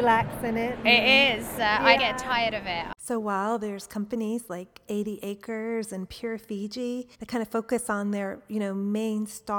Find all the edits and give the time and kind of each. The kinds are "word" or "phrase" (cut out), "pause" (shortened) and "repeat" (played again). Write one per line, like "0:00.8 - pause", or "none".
0:02.0 - word
0:03.0 - pause
0:07.1 - pause

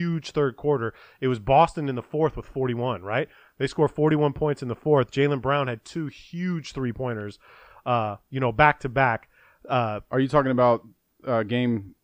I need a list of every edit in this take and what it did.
none

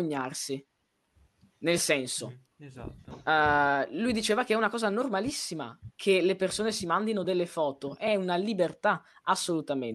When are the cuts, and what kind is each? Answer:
none

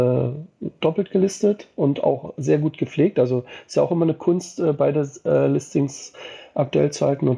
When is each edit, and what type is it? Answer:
none

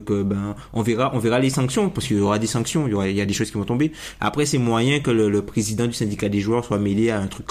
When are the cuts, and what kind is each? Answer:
none

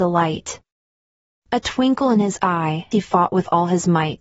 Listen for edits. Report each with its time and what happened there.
0:02.9 - word

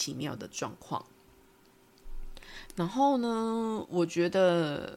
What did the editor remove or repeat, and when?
none

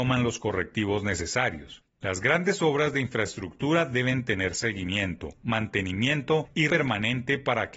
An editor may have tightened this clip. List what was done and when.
0:06.7 - word

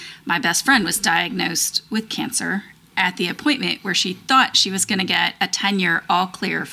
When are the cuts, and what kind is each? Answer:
none

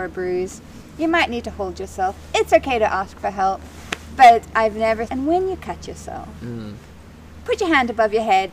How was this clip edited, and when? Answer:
0:05.1 - word

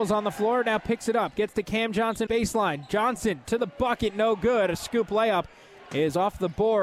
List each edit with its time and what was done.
0:02.3 - word

